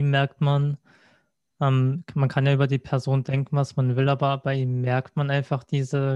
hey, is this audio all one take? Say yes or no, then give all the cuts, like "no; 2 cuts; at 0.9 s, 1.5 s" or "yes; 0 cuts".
yes; 0 cuts